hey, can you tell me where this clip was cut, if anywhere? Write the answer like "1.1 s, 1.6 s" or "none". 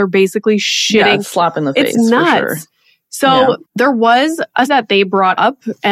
3.6 s, 4.7 s

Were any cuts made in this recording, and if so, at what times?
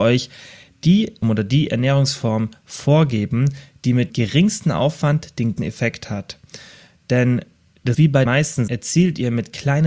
1.2 s, 4.1 s, 5.6 s, 7.9 s, 8.3 s, 8.7 s

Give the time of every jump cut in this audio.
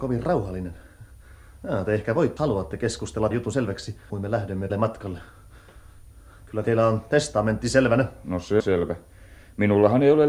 2.4 s, 3.3 s, 4.1 s, 4.7 s, 6.6 s, 8.6 s

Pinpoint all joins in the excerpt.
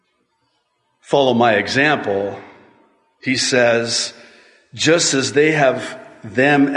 none

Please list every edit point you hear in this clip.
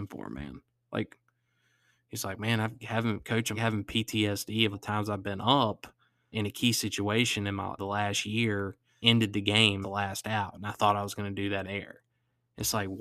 2.8 s, 3.5 s, 4.7 s, 6.3 s, 7.8 s, 9.0 s, 9.8 s, 11.6 s

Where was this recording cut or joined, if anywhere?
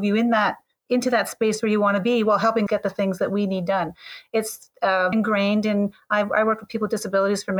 2.7 s, 5.1 s

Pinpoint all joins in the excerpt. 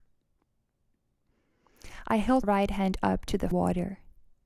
2.4 s, 3.5 s

